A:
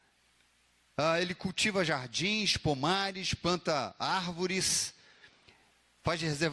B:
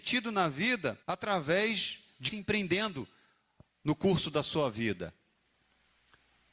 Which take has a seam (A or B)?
B